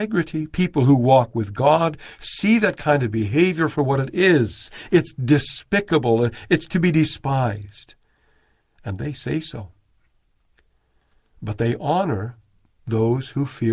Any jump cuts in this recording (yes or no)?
no